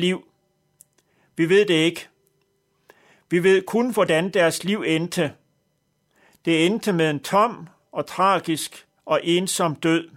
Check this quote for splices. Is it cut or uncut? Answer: uncut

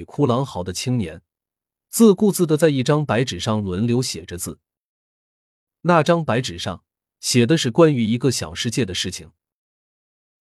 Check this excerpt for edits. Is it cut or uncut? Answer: uncut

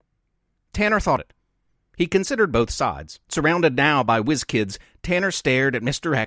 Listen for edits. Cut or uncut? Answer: cut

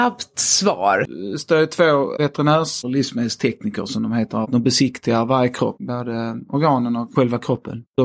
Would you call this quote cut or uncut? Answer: uncut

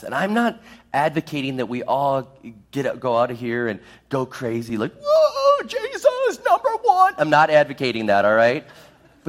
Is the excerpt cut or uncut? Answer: uncut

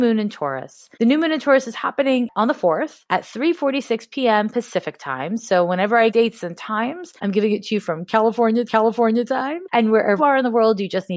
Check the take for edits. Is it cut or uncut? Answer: cut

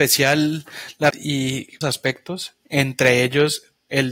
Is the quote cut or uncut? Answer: cut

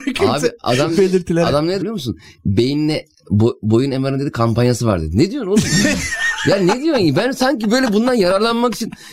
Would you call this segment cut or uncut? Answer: cut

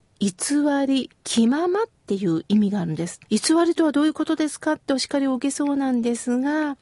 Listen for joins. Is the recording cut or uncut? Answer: cut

